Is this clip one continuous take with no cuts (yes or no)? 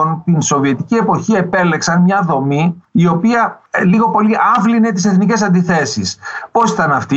yes